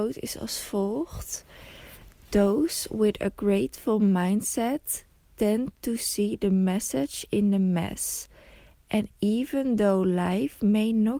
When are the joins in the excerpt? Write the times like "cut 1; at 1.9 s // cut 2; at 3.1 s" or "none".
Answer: none